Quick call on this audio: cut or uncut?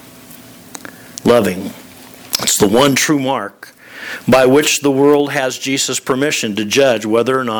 uncut